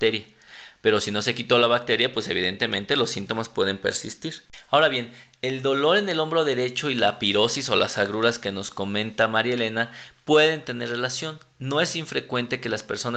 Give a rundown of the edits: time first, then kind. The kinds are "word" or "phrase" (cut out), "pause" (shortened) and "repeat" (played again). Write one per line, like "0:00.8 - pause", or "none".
none